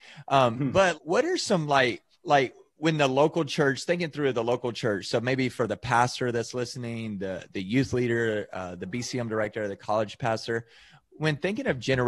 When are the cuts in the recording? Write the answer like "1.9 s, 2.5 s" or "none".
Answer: 0.9 s, 2.1 s